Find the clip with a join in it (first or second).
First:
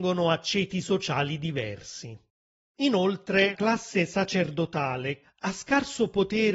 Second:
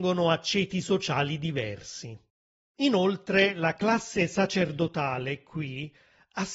first